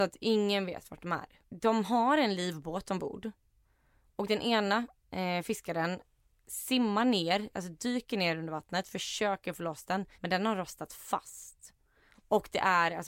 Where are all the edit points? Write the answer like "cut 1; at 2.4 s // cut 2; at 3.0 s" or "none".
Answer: cut 1; at 10.1 s